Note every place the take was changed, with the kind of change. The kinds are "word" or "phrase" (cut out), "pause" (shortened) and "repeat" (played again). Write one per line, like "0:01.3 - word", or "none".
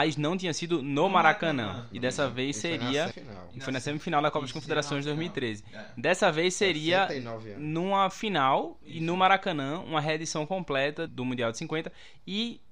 0:03.1 - word
0:11.1 - word